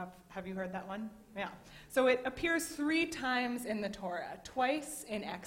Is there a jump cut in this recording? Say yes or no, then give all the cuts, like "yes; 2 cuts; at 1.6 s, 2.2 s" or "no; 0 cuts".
no; 0 cuts